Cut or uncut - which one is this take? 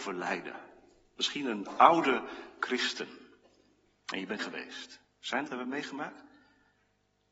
cut